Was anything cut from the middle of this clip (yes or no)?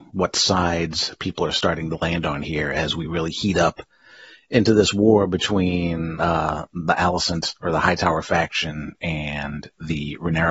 no